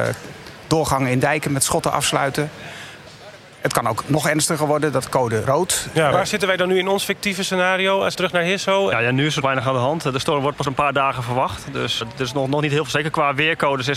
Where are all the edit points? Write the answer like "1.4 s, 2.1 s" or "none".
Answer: 5.0 s, 5.4 s, 6.1 s, 8.1 s, 9.4 s, 10.6 s, 12.0 s